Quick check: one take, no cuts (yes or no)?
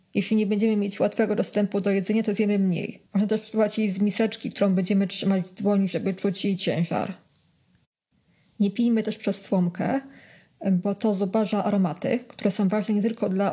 no